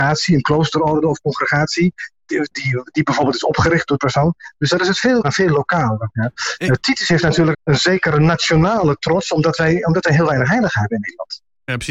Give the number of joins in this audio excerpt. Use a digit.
4